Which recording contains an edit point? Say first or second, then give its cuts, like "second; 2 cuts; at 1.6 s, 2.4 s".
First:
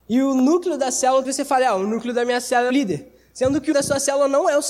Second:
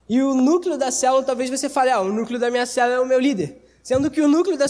first; 3 cuts; at 1.2 s, 2.7 s, 3.7 s